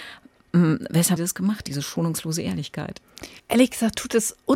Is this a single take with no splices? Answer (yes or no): no